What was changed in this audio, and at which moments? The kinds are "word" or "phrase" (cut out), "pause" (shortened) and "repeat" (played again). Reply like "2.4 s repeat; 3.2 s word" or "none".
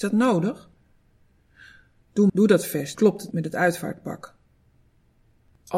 2.3 s word; 2.9 s word; 3.3 s word